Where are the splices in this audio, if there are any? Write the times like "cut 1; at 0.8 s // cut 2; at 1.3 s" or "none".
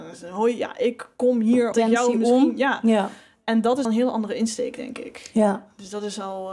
cut 1; at 1.7 s // cut 2; at 3.8 s

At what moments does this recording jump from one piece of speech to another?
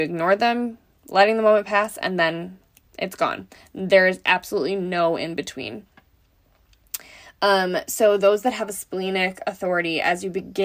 none

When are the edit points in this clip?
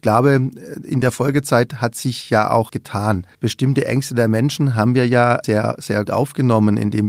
cut 1; at 2.7 s // cut 2; at 3.3 s // cut 3; at 5.4 s // cut 4; at 6.1 s

